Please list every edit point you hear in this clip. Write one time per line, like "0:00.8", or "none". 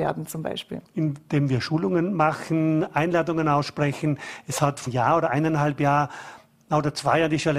0:04.9